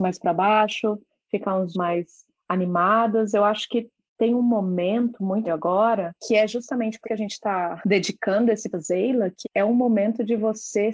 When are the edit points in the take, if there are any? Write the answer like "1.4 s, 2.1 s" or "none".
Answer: 1.7 s, 5.5 s, 7.0 s, 8.7 s, 9.4 s